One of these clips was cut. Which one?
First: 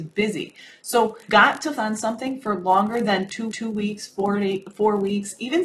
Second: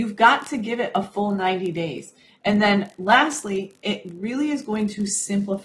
first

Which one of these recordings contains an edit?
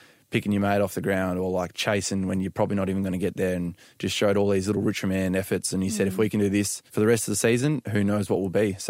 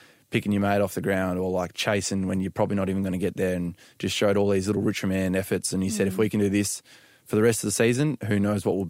first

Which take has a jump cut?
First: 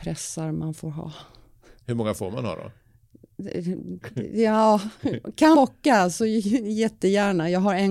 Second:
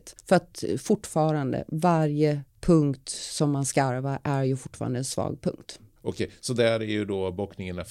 first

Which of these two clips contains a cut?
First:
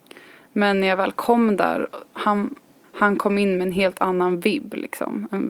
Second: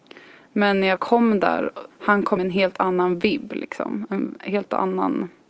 second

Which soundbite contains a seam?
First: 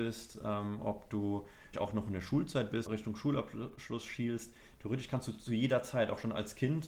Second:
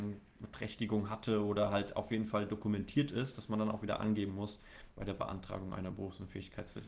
first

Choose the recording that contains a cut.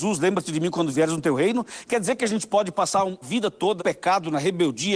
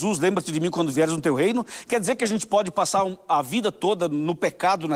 first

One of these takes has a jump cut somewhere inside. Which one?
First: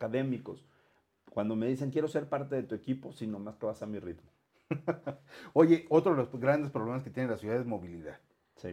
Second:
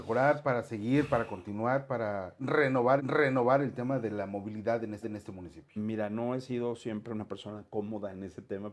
second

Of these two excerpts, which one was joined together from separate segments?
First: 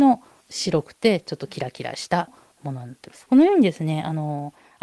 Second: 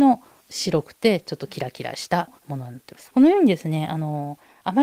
second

